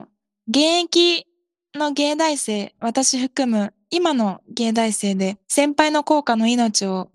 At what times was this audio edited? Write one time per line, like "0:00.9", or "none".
0:05.4